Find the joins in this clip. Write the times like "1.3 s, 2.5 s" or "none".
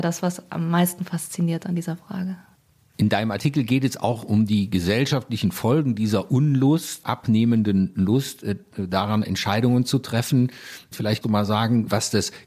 7.0 s, 11.2 s